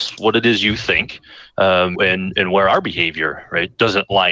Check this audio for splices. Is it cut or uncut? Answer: cut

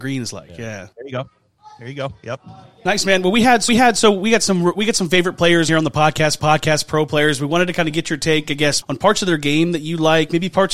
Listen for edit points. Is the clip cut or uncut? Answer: cut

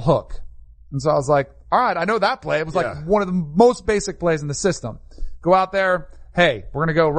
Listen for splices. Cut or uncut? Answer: uncut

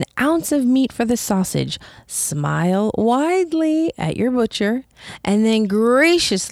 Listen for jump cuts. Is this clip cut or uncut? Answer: uncut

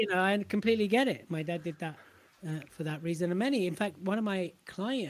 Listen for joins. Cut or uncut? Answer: uncut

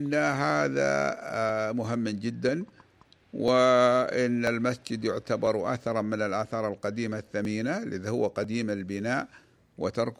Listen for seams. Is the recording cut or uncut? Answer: uncut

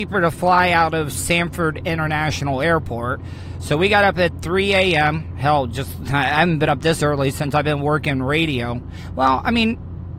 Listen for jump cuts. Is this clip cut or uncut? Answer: uncut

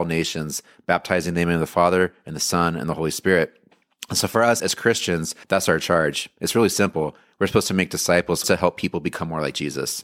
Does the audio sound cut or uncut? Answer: cut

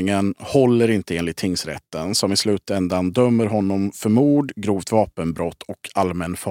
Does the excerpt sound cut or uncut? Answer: uncut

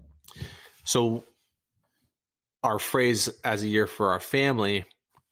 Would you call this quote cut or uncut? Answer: uncut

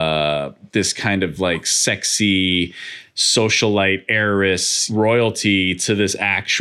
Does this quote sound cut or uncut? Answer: uncut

